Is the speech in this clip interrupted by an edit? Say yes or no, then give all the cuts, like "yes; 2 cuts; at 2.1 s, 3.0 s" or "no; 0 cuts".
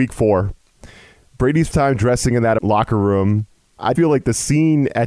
yes; 3 cuts; at 1.7 s, 2.6 s, 3.9 s